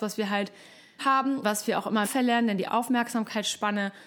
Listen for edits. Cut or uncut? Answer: cut